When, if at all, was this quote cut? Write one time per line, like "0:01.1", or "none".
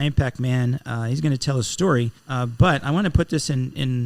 0:02.2